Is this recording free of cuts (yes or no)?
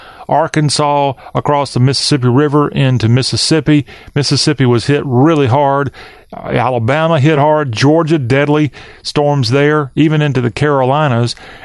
yes